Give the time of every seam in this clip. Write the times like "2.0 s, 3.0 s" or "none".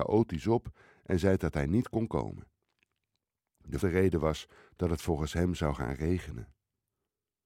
3.8 s